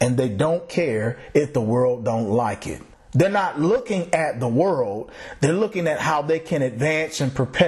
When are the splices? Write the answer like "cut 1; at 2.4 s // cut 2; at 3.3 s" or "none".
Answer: cut 1; at 2.9 s